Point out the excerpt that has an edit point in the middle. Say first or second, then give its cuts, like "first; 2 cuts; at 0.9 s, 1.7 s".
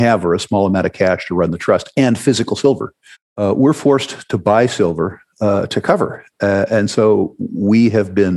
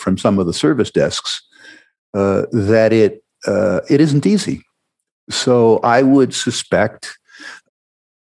first; 1 cut; at 3.1 s